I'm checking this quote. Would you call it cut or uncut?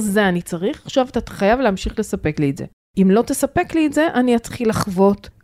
uncut